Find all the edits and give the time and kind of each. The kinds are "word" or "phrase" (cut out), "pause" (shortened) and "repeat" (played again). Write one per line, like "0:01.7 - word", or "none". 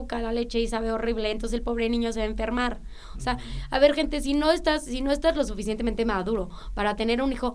none